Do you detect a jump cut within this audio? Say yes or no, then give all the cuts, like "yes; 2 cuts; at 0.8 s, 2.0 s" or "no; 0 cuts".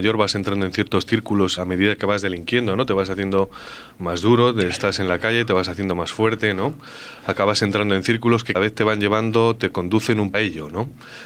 yes; 3 cuts; at 1.6 s, 8.5 s, 10.3 s